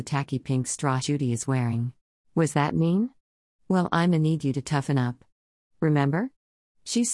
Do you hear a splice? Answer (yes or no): yes